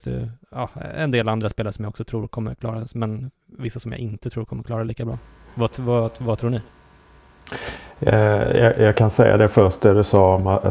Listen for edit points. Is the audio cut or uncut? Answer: uncut